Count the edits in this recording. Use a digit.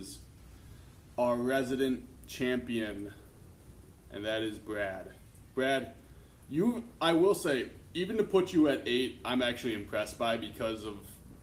0